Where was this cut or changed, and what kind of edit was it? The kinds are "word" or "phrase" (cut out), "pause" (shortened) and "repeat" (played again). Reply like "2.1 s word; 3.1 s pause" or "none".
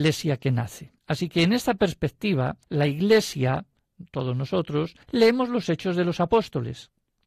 1.0 s pause; 2.6 s pause; 5.0 s pause